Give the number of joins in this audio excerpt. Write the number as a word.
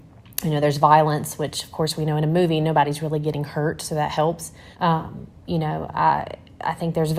one